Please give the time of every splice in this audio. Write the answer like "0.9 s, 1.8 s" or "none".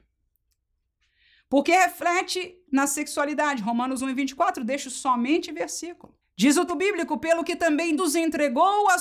5.5 s, 6.2 s, 6.7 s, 8.0 s